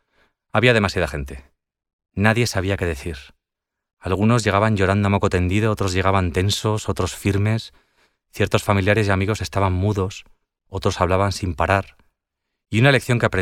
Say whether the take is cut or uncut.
uncut